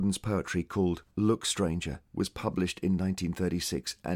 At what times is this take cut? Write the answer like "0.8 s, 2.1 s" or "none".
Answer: 1.1 s, 2.1 s